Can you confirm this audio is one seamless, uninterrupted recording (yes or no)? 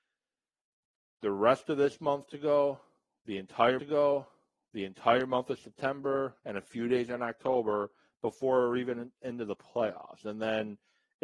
no